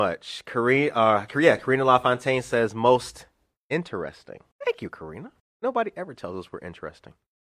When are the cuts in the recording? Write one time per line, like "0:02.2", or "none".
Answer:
0:04.5
0:05.4